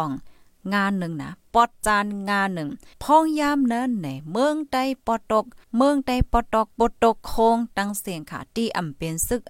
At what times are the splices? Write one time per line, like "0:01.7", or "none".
0:02.9
0:05.6
0:06.7